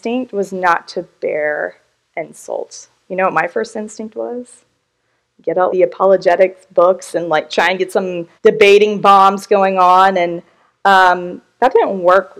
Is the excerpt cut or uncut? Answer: cut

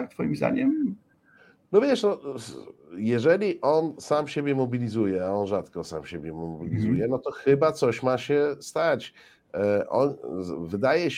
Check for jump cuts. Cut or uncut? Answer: uncut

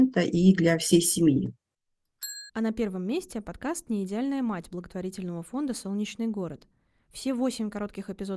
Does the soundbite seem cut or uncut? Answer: cut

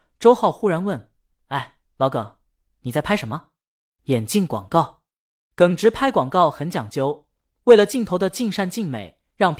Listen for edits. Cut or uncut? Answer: uncut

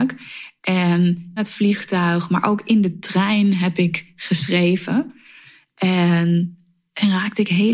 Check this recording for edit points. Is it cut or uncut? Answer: cut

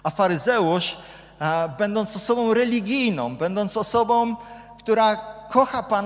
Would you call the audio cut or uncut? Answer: uncut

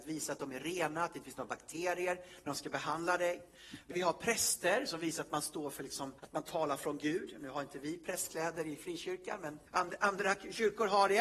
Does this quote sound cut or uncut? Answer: cut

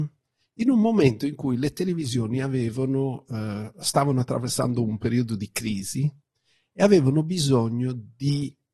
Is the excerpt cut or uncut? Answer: uncut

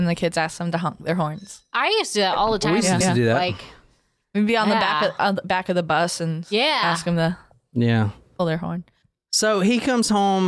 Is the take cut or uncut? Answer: cut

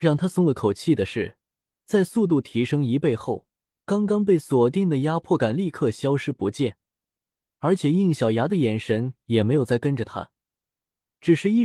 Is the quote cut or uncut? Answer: uncut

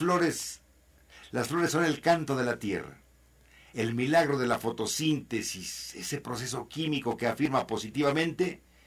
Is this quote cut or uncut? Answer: uncut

